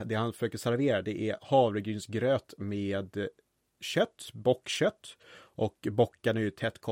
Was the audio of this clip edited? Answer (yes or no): no